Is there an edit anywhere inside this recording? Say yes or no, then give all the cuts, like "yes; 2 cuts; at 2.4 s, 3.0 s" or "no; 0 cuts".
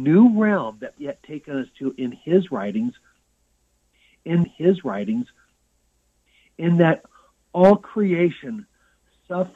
yes; 2 cuts; at 1.0 s, 4.4 s